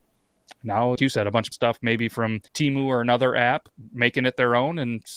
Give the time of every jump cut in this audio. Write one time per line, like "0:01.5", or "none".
0:01.0
0:01.5
0:02.5

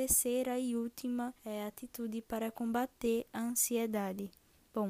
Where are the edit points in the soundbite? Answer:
0:01.4

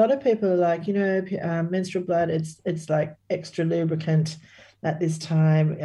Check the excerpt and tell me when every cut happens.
0:03.2

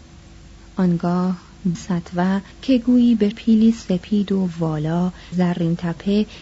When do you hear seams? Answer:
0:01.7
0:02.5
0:03.3
0:05.3

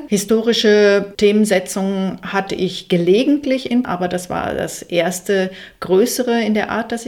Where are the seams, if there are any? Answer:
0:03.8

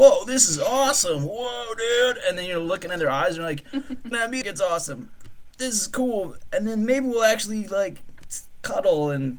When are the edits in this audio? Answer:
0:04.1
0:04.4

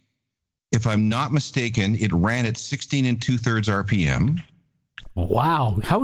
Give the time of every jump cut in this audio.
none

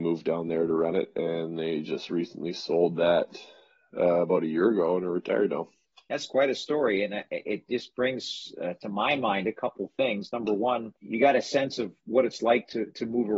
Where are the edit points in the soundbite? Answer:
0:11.0

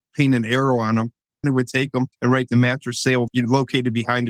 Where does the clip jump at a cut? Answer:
0:01.4
0:02.1
0:03.3

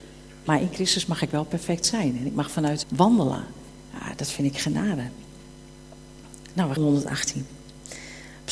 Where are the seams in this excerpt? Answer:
0:02.8
0:06.8

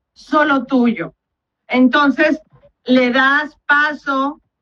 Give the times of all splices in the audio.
none

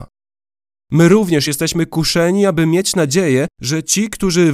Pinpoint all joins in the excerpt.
none

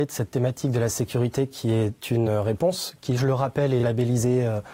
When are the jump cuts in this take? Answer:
none

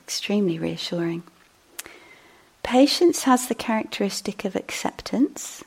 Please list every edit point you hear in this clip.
none

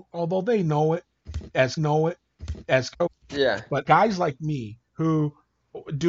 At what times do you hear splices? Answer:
0:01.8
0:03.8
0:04.9

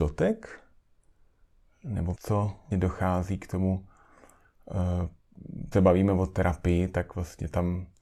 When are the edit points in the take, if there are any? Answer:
0:02.2
0:02.7
0:05.7

